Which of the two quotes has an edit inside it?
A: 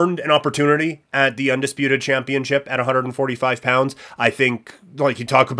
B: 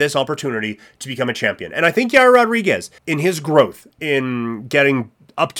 B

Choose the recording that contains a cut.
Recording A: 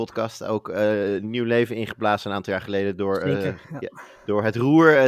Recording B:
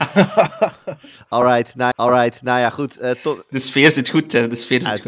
B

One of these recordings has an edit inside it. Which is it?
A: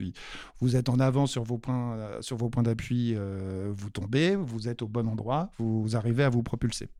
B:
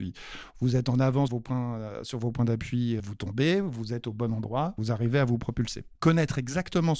B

